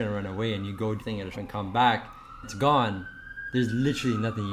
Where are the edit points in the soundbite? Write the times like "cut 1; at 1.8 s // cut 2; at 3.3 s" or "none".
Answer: cut 1; at 1.0 s // cut 2; at 1.3 s // cut 3; at 2.4 s